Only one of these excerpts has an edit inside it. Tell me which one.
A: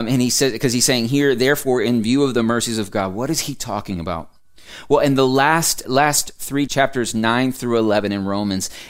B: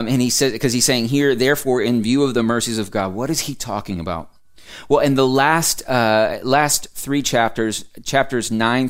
A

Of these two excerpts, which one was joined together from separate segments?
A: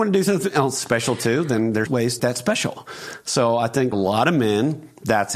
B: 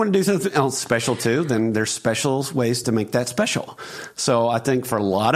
A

